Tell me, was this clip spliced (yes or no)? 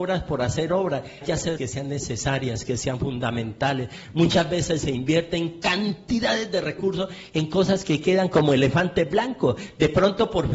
yes